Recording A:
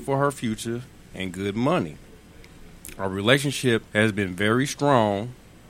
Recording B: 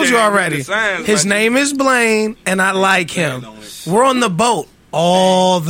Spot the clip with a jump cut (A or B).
A